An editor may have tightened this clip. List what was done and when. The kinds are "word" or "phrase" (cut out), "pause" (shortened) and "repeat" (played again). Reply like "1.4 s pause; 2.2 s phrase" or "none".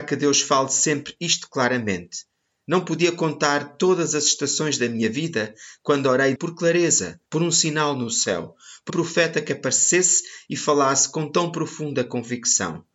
6.4 s word; 7.2 s pause; 8.9 s word